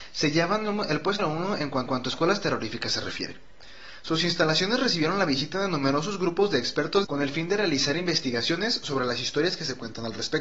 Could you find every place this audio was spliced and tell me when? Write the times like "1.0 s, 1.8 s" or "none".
1.2 s, 1.9 s, 7.0 s

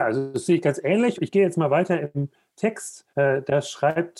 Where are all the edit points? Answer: 1.1 s, 3.1 s

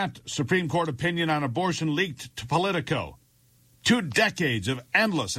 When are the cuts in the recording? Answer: none

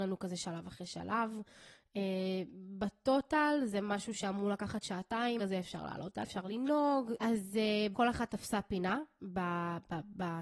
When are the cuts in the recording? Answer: 5.4 s, 6.2 s, 7.9 s

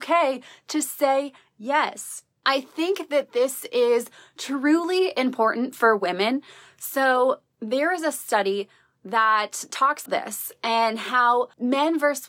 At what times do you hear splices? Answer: 10.1 s

